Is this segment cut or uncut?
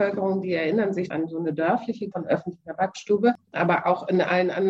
cut